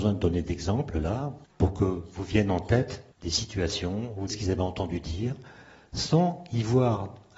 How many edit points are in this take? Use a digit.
3